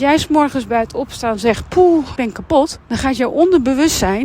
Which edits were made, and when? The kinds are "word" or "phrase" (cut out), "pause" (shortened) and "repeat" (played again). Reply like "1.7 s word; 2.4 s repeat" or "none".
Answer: 2.2 s word; 2.8 s pause